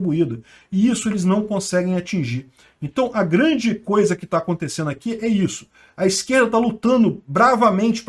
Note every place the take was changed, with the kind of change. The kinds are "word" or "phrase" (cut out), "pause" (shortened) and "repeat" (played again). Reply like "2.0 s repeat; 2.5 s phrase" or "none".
none